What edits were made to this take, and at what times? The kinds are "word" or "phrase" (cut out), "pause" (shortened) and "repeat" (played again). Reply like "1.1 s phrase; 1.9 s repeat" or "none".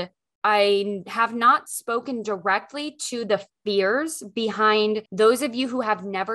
5.1 s pause